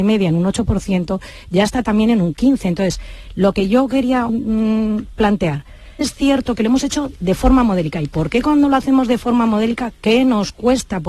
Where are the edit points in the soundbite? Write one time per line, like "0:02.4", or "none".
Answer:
0:04.3
0:06.0